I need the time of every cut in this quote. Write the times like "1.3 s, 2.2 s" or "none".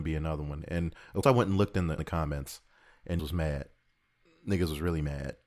1.2 s, 2.0 s, 3.2 s